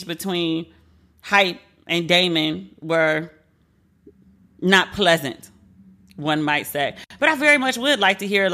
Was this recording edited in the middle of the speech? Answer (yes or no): no